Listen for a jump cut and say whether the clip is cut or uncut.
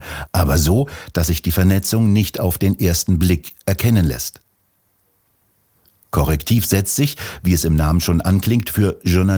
uncut